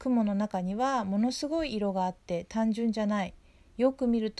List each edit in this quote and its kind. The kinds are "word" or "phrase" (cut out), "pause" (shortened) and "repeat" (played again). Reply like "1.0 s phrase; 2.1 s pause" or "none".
none